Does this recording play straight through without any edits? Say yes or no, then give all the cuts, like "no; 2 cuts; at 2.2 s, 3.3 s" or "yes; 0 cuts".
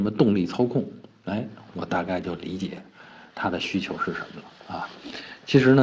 yes; 0 cuts